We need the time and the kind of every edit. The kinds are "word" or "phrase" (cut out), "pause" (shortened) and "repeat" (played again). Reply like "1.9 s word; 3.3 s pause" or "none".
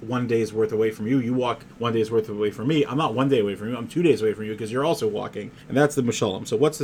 1.7 s pause; 5.6 s pause